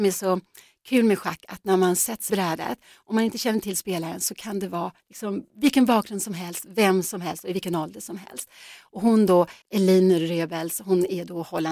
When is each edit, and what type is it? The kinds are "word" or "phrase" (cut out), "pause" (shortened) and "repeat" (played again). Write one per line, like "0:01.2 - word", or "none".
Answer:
0:02.3 - word
0:05.0 - pause
0:09.6 - pause